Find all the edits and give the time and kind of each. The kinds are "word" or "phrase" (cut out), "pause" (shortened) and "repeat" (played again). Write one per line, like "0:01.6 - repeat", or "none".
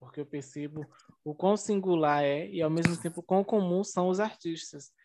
none